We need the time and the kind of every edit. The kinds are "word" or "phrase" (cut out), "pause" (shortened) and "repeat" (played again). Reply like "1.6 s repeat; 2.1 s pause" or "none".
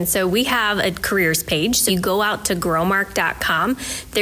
1.9 s word